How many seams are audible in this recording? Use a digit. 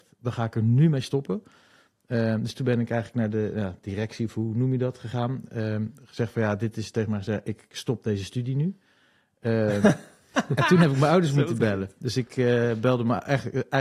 0